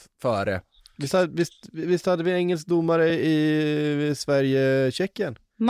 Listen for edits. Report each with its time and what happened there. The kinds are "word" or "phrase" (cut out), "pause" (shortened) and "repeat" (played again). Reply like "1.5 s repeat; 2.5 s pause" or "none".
none